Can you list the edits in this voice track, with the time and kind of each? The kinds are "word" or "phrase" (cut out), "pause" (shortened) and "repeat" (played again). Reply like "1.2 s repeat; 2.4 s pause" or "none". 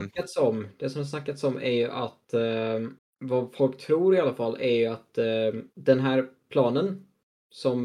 3.0 s pause; 5.7 s pause

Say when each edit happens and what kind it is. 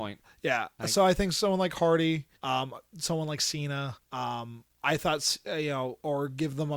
2.4 s pause; 4.0 s pause

